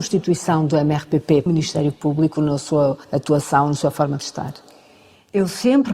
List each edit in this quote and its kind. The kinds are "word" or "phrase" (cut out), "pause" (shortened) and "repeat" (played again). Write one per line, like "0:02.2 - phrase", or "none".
0:01.5 - word
0:03.0 - pause